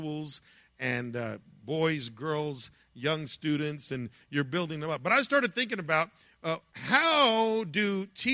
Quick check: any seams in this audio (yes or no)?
no